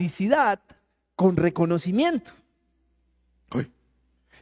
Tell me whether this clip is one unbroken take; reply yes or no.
yes